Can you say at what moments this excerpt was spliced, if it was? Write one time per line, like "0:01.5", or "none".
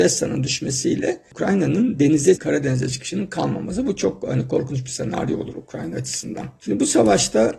0:02.4